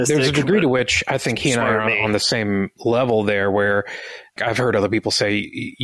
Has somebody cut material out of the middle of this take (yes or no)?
no